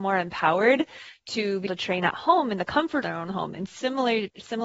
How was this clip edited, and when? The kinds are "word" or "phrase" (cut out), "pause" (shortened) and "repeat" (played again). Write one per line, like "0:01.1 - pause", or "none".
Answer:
0:01.7 - word
0:03.0 - word